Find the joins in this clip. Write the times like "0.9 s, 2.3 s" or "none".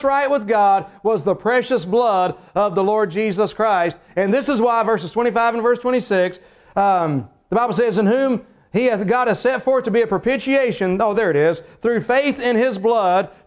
none